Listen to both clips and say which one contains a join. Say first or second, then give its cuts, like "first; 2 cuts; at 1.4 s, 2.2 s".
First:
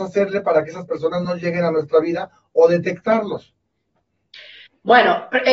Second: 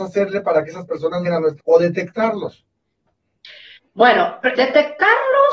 second; 3 cuts; at 1.2 s, 1.6 s, 4.5 s